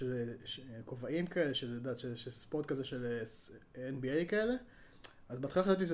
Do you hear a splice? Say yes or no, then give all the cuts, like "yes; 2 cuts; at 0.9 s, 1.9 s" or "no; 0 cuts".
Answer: no; 0 cuts